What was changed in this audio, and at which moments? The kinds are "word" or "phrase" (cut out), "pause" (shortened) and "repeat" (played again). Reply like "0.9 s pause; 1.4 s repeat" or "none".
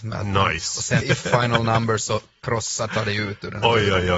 1.0 s word; 2.9 s word